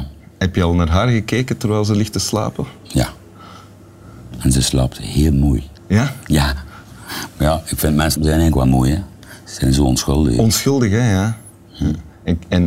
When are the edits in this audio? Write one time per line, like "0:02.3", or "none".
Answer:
0:02.8
0:05.8
0:08.2